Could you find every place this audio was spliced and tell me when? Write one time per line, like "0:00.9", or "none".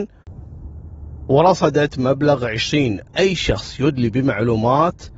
0:03.1